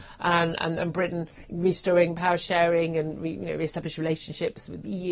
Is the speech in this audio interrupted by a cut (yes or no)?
no